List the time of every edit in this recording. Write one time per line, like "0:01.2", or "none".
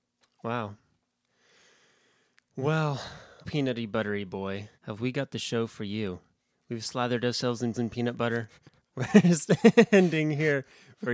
0:03.4
0:04.7
0:07.7